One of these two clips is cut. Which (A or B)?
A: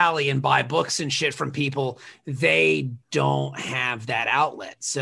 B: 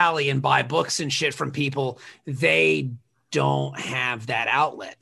A